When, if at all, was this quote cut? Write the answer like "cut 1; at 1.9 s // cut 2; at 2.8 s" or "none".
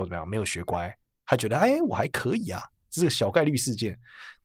none